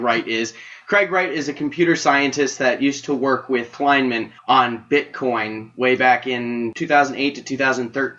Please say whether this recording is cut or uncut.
cut